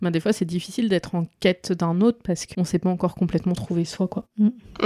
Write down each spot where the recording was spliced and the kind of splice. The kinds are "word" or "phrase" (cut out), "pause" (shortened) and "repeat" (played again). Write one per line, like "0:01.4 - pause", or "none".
0:02.5 - word

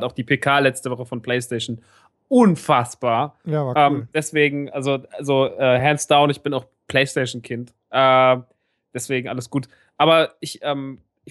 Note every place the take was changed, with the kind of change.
none

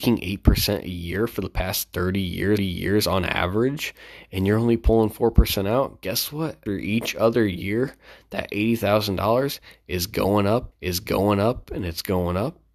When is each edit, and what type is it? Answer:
0:02.6 - repeat
0:06.7 - word
0:10.7 - repeat

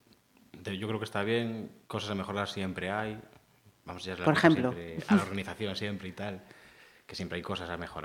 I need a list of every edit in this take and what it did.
0:01.8 - pause

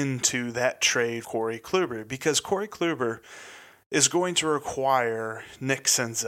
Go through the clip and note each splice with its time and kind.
0:01.2 - word

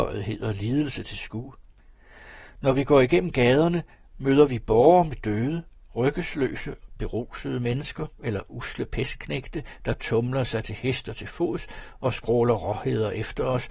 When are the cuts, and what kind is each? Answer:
none

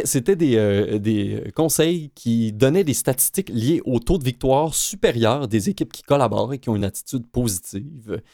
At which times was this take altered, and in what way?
none

